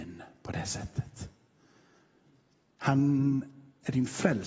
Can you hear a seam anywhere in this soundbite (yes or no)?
no